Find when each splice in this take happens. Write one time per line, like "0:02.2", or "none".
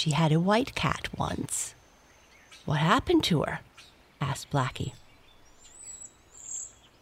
none